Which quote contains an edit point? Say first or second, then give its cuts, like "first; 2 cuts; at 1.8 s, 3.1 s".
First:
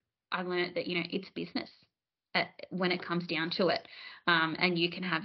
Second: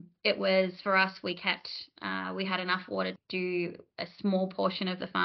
second; 1 cut; at 3.2 s